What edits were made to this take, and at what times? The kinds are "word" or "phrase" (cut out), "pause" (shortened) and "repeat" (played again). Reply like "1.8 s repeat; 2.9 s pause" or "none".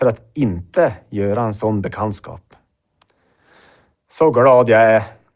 none

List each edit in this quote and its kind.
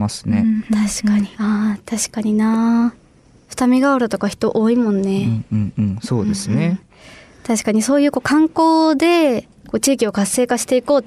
1.3 s phrase

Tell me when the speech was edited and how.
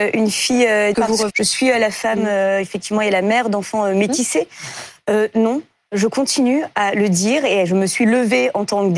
0.9 s word; 1.3 s word

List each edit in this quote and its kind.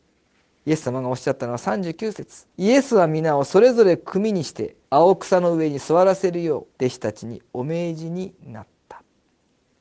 2.5 s pause; 4.8 s pause; 6.7 s pause

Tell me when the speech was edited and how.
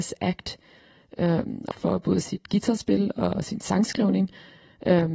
1.7 s phrase

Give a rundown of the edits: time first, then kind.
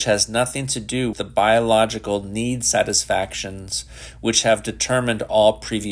1.1 s word

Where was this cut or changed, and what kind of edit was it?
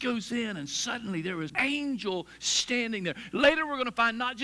1.5 s word

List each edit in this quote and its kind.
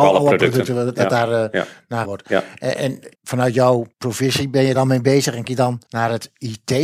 2.0 s word; 3.1 s pause; 3.9 s pause; 4.7 s word; 5.4 s word; 5.9 s pause

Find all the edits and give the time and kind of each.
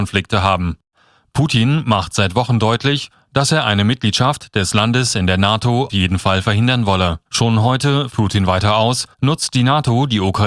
5.9 s word; 7.3 s pause; 8.1 s word; 9.1 s pause

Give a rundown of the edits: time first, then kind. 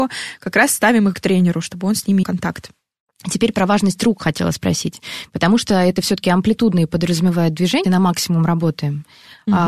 1.1 s word; 2.2 s word; 7.8 s word

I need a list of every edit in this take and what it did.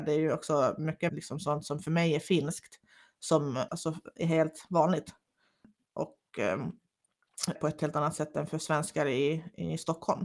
1.1 s word; 3.7 s word; 7.5 s word

